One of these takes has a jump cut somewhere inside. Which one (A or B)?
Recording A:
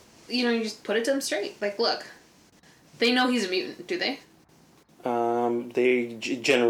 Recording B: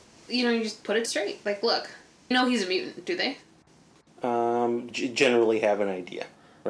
B